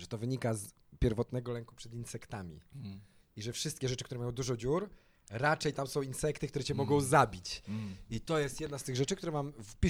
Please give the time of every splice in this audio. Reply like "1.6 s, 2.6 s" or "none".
none